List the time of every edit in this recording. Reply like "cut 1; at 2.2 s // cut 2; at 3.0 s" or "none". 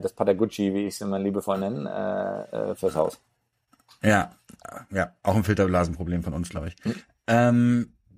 none